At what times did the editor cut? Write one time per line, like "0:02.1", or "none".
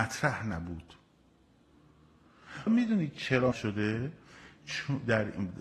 0:02.7
0:03.5